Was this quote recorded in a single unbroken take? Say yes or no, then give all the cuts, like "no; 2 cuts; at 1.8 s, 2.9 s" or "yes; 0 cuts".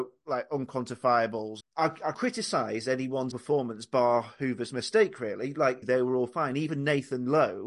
no; 4 cuts; at 1.6 s, 2.1 s, 3.3 s, 5.8 s